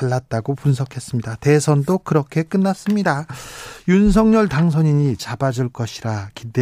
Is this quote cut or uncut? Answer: cut